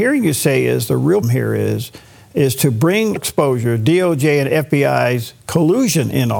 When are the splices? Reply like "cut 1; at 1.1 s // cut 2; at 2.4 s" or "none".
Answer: cut 1; at 1.2 s // cut 2; at 3.2 s // cut 3; at 5.4 s